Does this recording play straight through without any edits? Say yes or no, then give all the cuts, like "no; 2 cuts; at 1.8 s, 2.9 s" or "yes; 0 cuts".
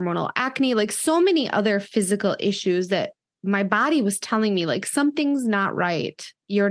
yes; 0 cuts